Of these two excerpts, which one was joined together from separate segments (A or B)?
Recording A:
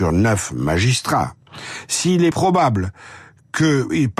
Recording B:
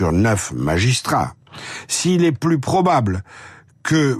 A